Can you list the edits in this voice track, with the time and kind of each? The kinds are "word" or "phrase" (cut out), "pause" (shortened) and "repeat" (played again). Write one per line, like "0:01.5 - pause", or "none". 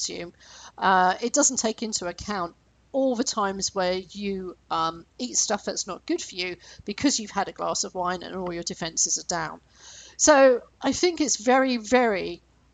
none